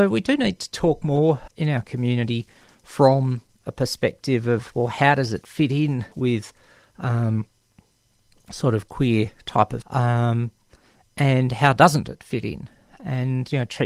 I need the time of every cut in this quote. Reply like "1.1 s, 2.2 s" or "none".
1.5 s, 3.6 s, 6.1 s, 9.8 s